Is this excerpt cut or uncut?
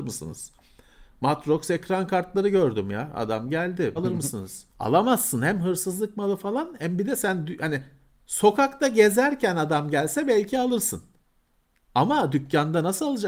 cut